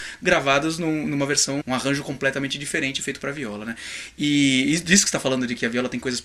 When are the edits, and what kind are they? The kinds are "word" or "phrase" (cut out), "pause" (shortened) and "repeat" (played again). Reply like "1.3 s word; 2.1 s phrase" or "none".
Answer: 1.6 s word